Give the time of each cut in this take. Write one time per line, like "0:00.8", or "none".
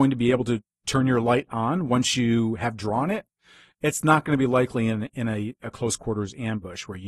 none